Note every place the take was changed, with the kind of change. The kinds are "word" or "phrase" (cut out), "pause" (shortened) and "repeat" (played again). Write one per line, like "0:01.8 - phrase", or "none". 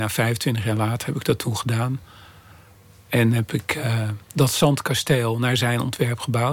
none